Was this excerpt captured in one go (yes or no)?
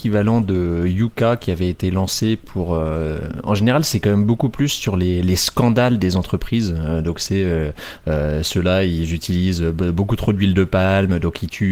yes